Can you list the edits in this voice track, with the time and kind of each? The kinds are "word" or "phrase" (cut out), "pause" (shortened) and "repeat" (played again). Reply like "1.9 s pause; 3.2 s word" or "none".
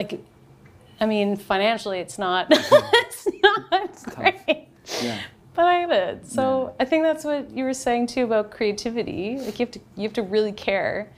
5.9 s word